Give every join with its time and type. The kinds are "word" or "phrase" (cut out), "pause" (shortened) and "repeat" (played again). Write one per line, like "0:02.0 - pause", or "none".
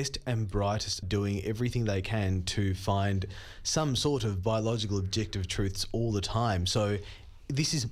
0:01.0 - word